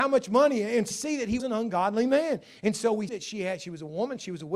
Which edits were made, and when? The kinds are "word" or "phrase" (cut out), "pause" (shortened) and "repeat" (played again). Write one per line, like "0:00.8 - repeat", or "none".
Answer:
0:00.9 - word
0:01.4 - word
0:03.1 - word